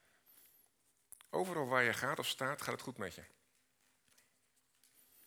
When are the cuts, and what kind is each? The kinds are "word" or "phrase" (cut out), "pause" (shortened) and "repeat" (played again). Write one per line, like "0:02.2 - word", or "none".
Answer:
none